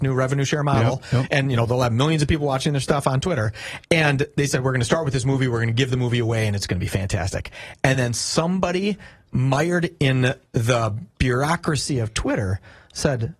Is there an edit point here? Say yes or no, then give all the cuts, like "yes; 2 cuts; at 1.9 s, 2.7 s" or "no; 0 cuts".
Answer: no; 0 cuts